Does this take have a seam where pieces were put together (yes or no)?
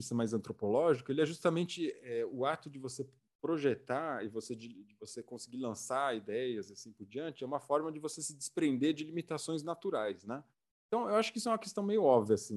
no